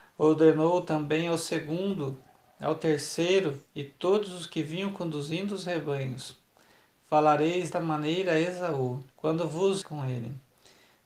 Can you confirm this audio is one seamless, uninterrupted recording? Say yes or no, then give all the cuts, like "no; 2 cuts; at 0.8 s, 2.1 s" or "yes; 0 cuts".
no; 4 cuts; at 3.7 s, 7.7 s, 9.1 s, 9.8 s